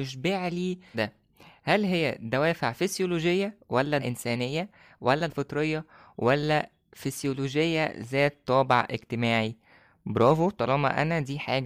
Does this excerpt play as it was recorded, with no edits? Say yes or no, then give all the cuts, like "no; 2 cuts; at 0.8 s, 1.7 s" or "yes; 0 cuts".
no; 3 cuts; at 0.9 s, 4.0 s, 5.3 s